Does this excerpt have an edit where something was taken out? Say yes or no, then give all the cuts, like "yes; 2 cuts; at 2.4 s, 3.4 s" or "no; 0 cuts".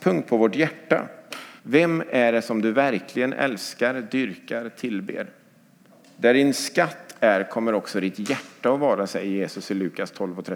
yes; 2 cuts; at 1.6 s, 5.9 s